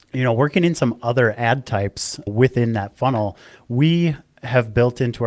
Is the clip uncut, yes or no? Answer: yes